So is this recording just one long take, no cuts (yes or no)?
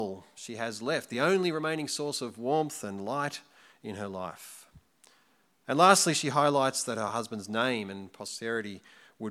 yes